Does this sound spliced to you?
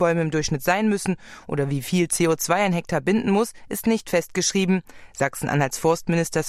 no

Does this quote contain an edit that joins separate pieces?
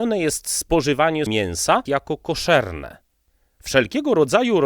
yes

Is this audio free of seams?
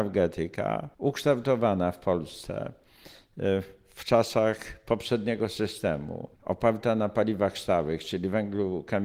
no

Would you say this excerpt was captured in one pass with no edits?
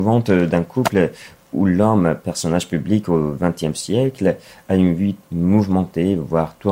yes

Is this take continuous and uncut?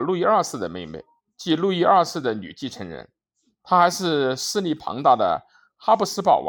yes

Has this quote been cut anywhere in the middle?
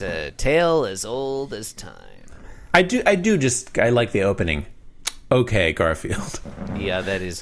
no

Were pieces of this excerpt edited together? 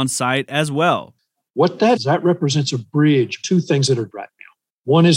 yes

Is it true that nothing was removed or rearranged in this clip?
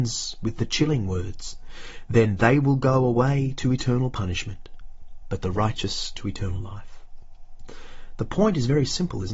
yes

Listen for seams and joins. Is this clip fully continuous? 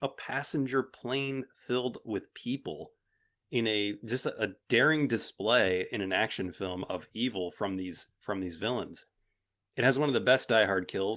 yes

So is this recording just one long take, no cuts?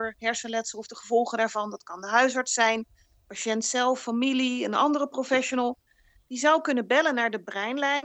yes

